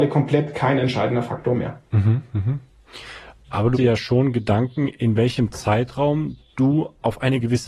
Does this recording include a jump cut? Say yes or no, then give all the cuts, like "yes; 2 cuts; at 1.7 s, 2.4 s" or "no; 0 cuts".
yes; 1 cut; at 3.7 s